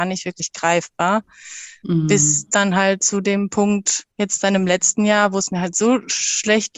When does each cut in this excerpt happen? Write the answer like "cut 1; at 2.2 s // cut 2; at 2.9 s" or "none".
cut 1; at 4.1 s